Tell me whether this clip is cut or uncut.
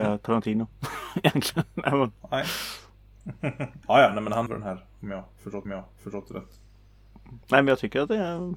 cut